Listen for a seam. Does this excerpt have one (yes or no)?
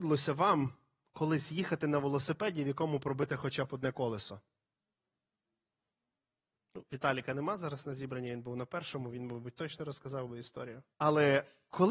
yes